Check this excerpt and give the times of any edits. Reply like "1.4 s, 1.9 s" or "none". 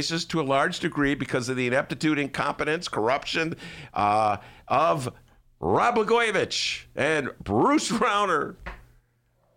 none